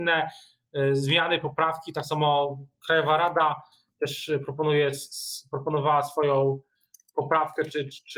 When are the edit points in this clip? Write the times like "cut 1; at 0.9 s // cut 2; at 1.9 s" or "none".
none